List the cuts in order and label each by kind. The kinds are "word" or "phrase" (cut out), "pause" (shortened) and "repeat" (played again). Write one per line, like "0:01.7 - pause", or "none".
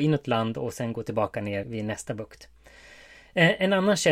0:01.6 - word